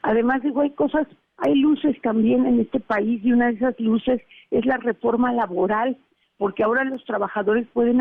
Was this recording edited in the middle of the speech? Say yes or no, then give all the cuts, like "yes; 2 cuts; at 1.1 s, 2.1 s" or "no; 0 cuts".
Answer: no; 0 cuts